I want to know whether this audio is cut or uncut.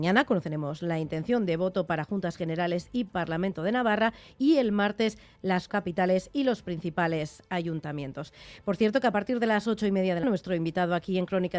cut